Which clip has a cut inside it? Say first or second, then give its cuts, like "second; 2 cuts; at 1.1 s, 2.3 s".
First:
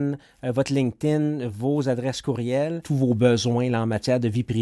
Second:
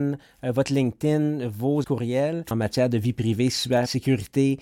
second; 2 cuts; at 1.8 s, 2.5 s